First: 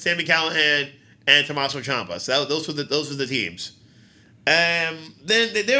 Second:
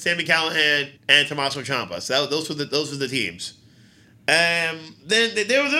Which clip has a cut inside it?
second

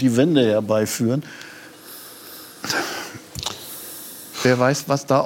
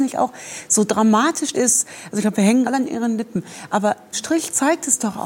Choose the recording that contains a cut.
second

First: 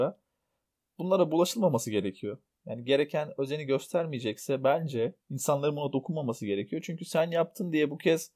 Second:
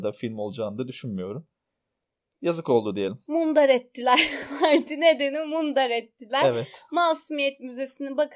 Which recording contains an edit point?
first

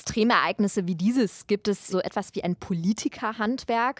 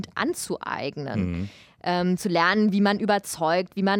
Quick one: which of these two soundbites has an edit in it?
first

